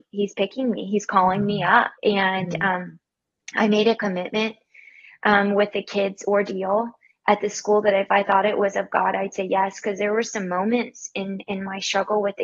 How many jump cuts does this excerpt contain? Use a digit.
1